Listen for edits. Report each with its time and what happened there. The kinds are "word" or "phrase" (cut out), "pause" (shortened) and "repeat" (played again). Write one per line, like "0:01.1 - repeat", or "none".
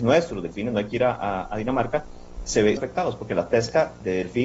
0:02.8 - phrase